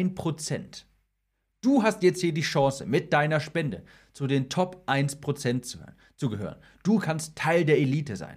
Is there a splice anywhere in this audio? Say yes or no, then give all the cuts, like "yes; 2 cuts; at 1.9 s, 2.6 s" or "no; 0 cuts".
no; 0 cuts